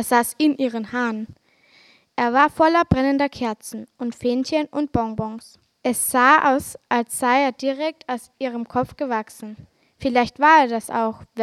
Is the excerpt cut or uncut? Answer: uncut